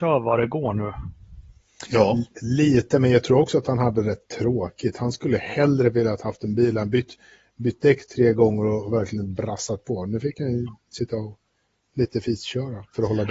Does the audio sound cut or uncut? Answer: cut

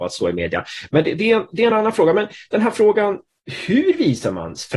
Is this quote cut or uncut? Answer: uncut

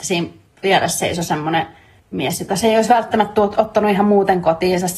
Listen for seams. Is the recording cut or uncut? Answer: uncut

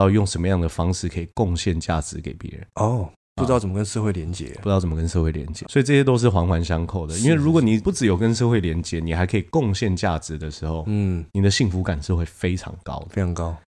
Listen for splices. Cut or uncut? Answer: cut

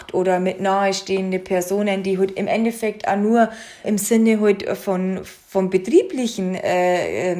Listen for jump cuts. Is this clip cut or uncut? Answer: cut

